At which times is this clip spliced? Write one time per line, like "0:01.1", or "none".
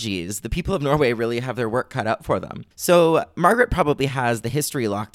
0:02.7